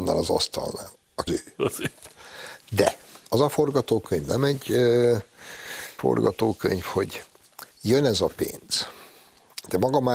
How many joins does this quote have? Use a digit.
4